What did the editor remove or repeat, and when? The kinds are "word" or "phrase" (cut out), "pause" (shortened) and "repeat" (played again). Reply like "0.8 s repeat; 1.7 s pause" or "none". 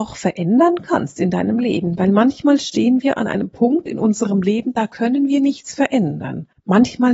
none